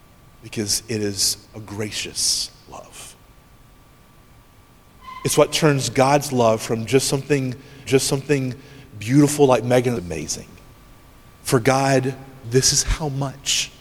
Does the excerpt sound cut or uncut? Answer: cut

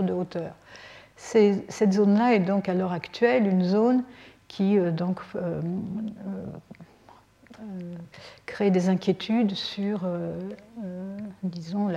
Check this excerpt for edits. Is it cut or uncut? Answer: uncut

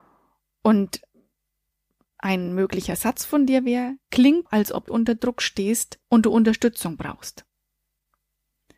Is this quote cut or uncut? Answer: cut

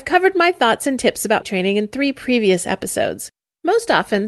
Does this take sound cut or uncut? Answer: cut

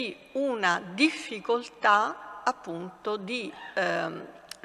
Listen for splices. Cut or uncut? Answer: uncut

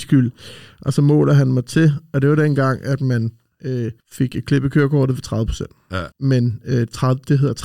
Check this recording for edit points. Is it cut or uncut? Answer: cut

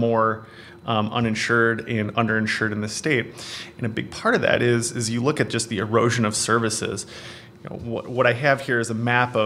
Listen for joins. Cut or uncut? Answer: uncut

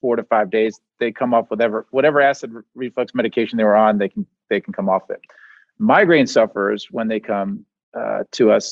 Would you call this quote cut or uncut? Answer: uncut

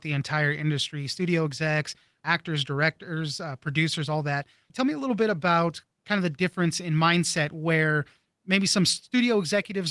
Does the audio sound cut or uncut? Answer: uncut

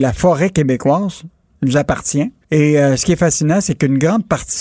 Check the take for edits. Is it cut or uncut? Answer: cut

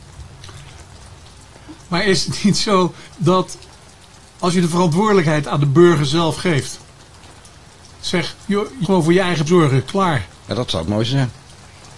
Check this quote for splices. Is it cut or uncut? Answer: cut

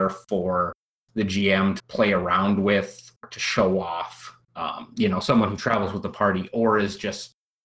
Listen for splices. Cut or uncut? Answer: cut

